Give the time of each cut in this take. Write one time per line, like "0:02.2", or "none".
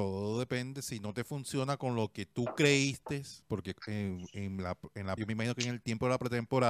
0:03.4
0:05.2